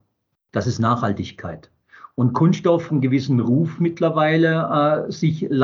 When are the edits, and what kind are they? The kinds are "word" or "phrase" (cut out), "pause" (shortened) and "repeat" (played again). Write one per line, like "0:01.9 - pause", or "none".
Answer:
0:02.9 - word